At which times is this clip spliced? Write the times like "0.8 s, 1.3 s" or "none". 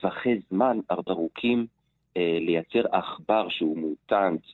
1.1 s